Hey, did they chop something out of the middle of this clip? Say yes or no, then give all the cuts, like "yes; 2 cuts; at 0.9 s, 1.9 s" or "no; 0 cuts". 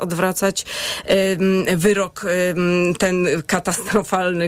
no; 0 cuts